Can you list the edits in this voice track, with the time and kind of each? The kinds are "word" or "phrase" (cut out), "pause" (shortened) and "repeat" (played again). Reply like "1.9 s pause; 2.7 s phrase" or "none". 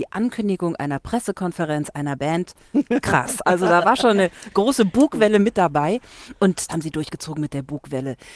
6.7 s word